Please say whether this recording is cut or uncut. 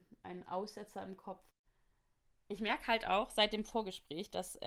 uncut